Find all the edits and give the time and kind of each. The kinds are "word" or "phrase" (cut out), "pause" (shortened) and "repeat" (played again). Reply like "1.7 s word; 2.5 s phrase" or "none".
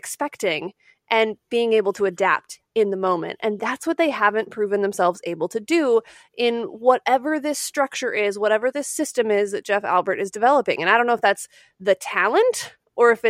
none